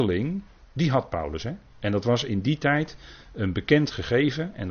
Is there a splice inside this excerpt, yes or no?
yes